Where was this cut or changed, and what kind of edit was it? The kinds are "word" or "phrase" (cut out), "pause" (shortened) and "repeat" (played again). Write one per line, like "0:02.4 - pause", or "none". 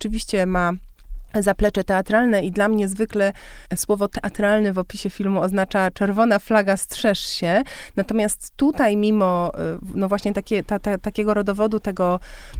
0:01.3 - pause
0:03.7 - pause